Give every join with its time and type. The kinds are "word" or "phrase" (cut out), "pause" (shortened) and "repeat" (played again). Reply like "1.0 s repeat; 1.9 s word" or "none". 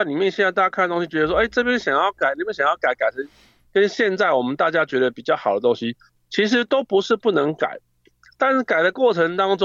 none